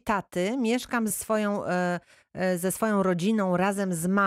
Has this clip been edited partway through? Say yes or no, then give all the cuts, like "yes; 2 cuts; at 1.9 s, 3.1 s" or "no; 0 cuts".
yes; 1 cut; at 1.1 s